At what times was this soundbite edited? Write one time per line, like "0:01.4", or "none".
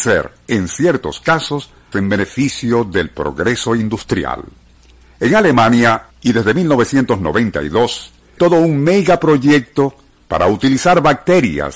0:01.9
0:04.7
0:06.1
0:08.4

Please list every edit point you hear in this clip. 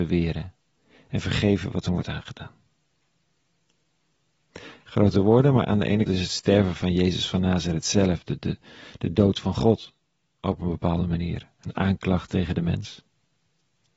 0:06.1

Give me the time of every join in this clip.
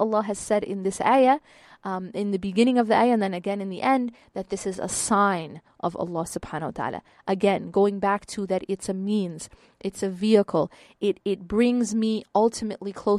none

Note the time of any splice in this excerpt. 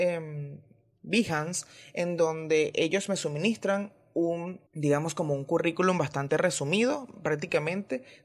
0:04.7

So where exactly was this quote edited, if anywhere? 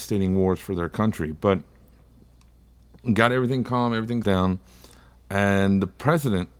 0:04.2

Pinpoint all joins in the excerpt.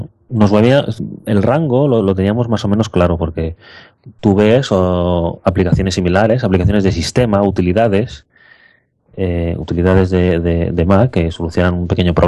none

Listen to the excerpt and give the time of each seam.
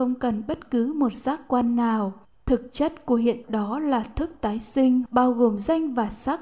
0:02.2
0:03.4
0:05.1

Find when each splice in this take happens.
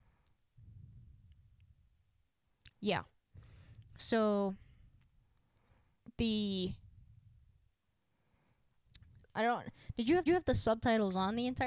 0:09.2
0:10.3

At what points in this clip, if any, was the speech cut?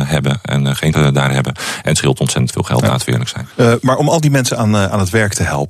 0:00.9
0:03.5

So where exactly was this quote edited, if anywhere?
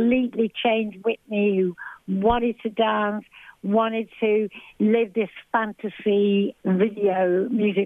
0:06.6

